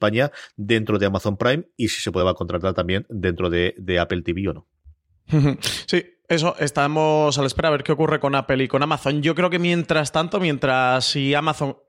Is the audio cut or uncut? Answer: uncut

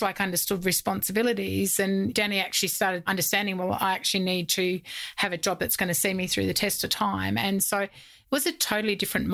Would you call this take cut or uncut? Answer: uncut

